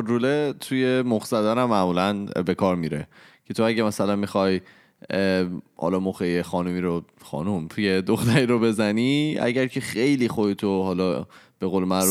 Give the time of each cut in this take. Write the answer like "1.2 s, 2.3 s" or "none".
none